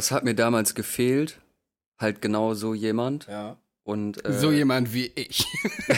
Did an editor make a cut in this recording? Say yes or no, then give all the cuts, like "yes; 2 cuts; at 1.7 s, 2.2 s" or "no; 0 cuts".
no; 0 cuts